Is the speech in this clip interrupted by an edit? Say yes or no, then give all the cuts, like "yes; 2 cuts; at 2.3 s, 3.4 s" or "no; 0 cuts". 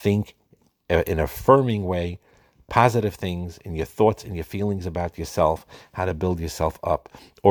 no; 0 cuts